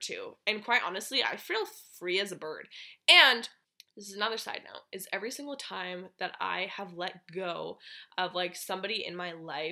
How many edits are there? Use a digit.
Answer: 1